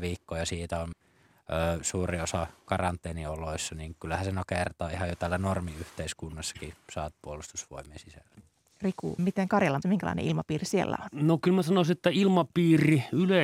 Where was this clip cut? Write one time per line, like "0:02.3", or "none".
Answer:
0:00.9
0:07.1
0:09.2
0:09.8